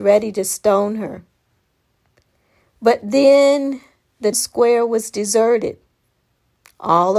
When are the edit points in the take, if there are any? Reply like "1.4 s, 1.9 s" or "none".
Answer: 4.3 s